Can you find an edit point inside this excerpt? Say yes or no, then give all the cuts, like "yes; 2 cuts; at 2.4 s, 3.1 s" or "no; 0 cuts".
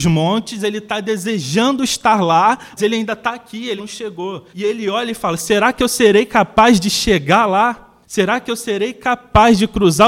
yes; 4 cuts; at 2.8 s, 3.8 s, 4.5 s, 8.0 s